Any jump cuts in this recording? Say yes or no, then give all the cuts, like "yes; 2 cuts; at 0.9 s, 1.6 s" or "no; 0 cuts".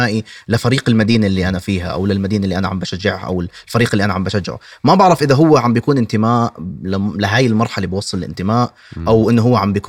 no; 0 cuts